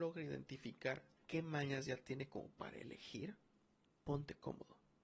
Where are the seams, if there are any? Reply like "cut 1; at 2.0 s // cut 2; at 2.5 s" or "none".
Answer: none